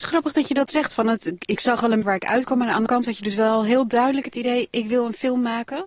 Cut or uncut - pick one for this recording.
cut